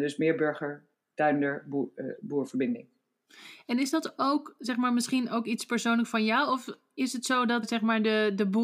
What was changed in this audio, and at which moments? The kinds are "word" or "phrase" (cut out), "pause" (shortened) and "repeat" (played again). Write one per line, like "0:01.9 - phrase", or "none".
0:00.9 - pause
0:07.6 - word